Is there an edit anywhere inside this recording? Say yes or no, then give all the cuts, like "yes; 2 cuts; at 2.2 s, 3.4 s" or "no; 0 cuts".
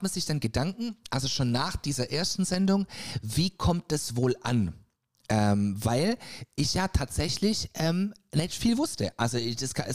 no; 0 cuts